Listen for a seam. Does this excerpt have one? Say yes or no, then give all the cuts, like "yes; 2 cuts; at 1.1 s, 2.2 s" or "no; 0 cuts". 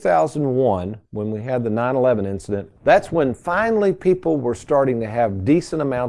yes; 1 cut; at 2.8 s